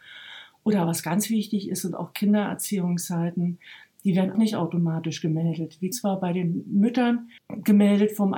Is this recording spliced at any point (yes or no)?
yes